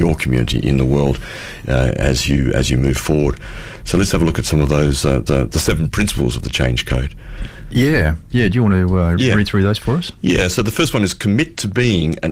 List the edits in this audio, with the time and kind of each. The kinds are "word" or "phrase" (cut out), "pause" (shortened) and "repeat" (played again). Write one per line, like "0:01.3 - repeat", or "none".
0:05.3 - repeat